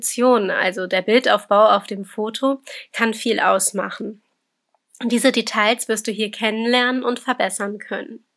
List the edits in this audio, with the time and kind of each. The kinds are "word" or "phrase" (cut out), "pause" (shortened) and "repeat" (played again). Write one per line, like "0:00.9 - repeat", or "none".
none